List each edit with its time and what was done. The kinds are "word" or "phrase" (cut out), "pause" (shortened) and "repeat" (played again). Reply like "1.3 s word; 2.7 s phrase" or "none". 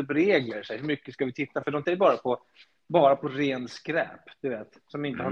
1.8 s word